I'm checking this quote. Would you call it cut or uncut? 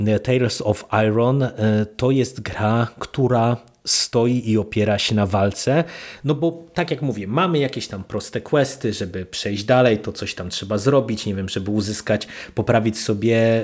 uncut